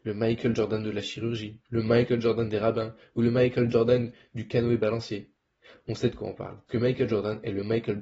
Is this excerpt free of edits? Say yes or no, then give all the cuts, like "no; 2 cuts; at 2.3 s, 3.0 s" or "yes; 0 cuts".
no; 2 cuts; at 1.6 s, 6.7 s